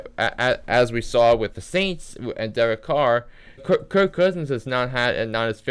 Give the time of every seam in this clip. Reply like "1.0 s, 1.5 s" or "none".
3.6 s